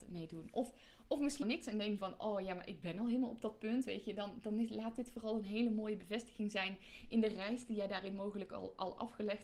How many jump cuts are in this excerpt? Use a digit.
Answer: 2